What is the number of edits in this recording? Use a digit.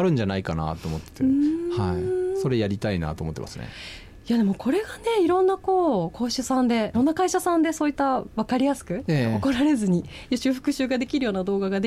1